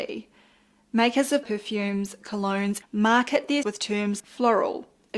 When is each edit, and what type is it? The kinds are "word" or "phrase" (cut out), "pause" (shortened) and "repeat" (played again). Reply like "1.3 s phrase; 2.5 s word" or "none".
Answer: 1.4 s word; 2.8 s phrase; 3.6 s word; 4.2 s word